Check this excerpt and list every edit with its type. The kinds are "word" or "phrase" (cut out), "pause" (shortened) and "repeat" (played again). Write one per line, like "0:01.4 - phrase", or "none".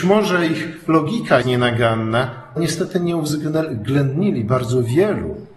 0:01.4 - word
0:02.6 - word